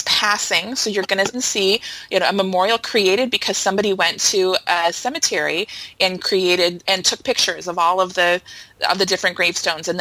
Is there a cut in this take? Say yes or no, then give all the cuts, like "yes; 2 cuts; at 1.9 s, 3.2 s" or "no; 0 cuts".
yes; 2 cuts; at 1.3 s, 6.9 s